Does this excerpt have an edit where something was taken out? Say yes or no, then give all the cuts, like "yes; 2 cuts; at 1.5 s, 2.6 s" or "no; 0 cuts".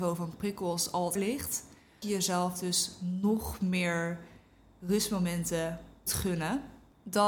yes; 3 cuts; at 1.2 s, 2.0 s, 6.1 s